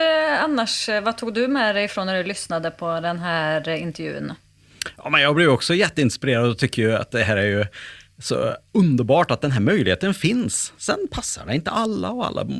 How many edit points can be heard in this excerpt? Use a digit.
0